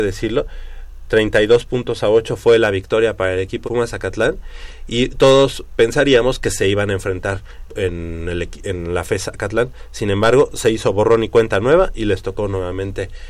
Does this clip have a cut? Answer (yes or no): yes